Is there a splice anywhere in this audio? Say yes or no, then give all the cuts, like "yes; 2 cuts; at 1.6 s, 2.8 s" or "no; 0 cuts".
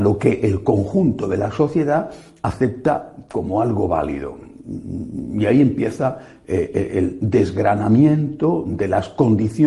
no; 0 cuts